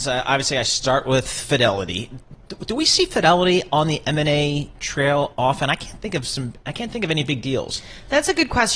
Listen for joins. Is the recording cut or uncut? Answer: uncut